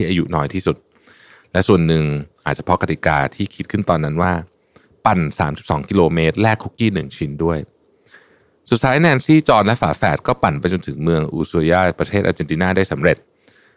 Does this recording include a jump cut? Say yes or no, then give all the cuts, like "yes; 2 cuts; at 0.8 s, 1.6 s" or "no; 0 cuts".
no; 0 cuts